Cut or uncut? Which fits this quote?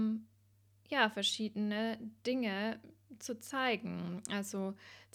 uncut